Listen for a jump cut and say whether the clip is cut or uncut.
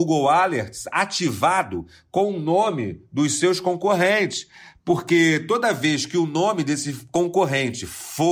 uncut